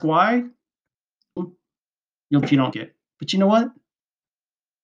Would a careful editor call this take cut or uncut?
cut